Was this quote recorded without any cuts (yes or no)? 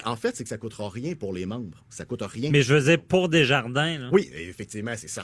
yes